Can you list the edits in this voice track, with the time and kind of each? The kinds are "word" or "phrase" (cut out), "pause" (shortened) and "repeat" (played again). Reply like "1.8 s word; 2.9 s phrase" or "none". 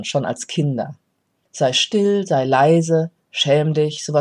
none